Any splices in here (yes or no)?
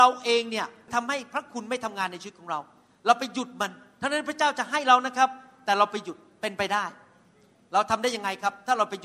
no